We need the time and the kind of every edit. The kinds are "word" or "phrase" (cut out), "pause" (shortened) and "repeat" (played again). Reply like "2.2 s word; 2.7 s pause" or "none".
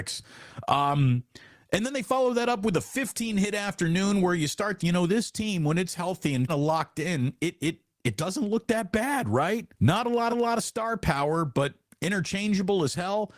4.8 s phrase; 6.5 s word; 9.7 s pause; 10.3 s repeat